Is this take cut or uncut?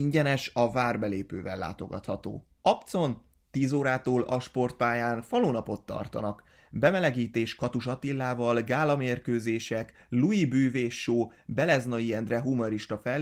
uncut